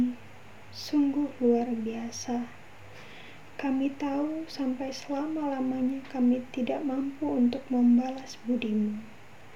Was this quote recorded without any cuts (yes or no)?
yes